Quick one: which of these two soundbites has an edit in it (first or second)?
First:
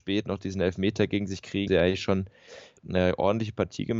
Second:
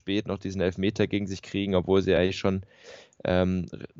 first